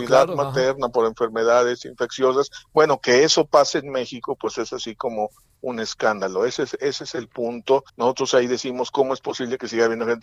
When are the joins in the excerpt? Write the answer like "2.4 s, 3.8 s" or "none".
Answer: 7.9 s